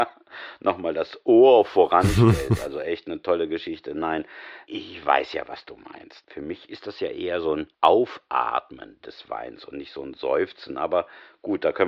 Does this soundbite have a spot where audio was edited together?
yes; 1 cut; at 7.7 s

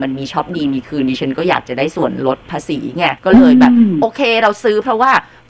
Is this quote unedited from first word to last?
no; 1 cut; at 3.2 s

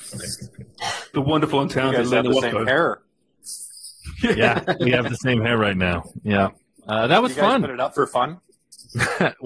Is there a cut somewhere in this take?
no; 0 cuts

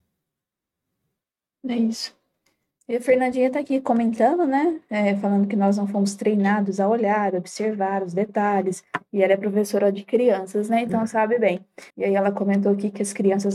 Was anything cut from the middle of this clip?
yes; 1 cut; at 11.9 s

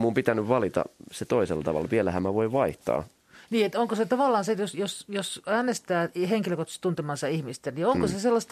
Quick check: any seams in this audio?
no; 0 cuts

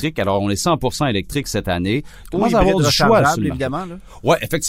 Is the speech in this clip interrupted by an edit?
no; 0 cuts

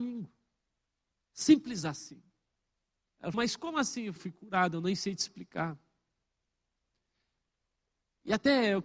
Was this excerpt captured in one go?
no; 2 cuts; at 3.3 s, 4.2 s

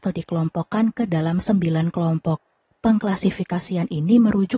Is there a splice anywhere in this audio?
no; 0 cuts

